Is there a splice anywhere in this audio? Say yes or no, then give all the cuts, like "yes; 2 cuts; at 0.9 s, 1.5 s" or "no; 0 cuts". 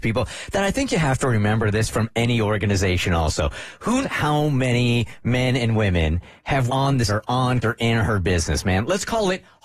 yes; 4 cuts; at 4.0 s, 6.7 s, 7.1 s, 7.6 s